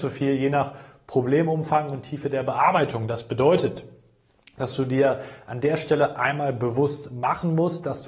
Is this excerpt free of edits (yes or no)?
yes